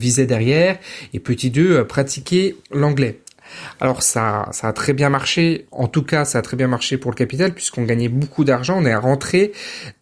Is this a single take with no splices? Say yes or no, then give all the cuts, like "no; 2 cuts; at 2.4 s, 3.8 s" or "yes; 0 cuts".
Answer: no; 2 cuts; at 2.6 s, 5.7 s